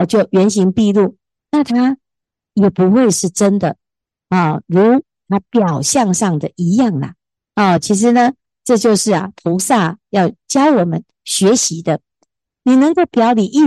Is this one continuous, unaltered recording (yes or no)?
yes